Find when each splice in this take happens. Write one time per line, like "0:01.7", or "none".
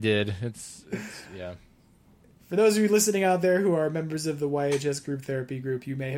none